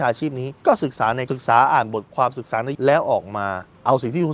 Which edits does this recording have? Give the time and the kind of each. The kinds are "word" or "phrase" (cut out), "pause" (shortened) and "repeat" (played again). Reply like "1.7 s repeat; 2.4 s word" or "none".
1.3 s word; 2.7 s word